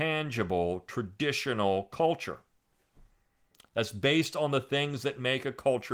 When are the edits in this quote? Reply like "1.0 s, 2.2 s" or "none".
none